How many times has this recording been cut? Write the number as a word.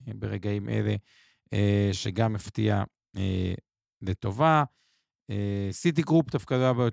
zero